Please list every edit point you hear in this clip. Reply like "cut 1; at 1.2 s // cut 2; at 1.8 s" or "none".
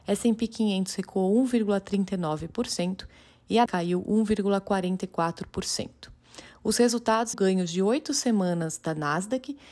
cut 1; at 3.7 s // cut 2; at 7.3 s